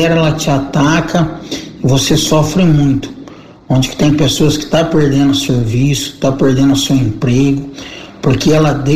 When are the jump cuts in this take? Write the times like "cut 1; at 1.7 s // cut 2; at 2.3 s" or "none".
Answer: none